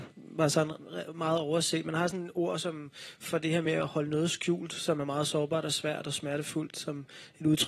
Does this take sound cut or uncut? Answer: uncut